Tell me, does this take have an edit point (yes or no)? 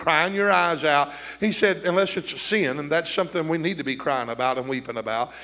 no